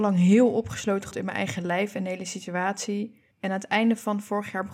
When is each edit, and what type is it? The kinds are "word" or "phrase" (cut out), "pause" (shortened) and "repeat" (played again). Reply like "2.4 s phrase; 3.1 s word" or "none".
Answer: 1.1 s word; 3.3 s pause